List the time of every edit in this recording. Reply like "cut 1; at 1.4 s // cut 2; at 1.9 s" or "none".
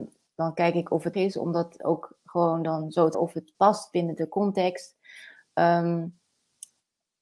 cut 1; at 1.1 s // cut 2; at 3.1 s